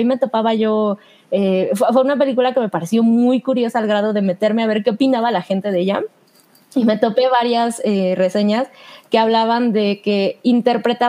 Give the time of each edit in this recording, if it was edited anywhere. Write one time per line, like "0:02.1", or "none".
none